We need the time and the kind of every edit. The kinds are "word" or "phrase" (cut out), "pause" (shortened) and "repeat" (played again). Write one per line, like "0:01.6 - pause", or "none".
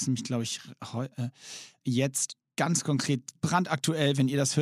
0:01.8 - word
0:03.3 - word